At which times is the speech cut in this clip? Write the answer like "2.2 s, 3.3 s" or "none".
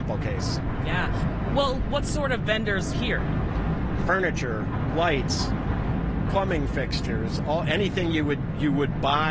2.9 s, 6.2 s

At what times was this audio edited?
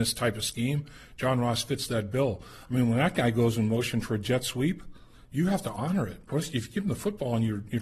none

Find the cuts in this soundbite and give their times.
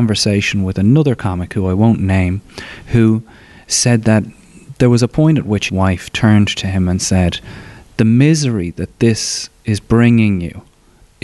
5.7 s

